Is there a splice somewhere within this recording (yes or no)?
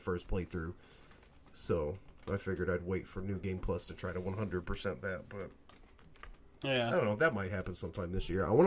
no